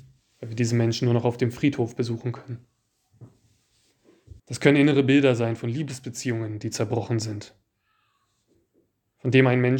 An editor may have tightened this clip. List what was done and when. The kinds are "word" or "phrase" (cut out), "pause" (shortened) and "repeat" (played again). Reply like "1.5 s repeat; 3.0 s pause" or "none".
4.4 s pause